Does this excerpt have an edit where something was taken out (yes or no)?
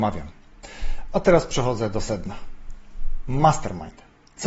no